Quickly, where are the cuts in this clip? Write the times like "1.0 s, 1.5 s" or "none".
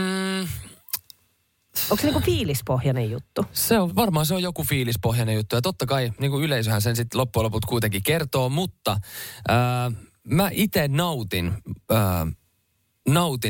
3.9 s